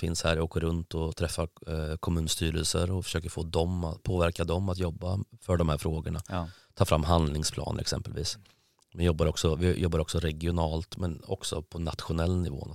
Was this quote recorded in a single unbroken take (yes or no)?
yes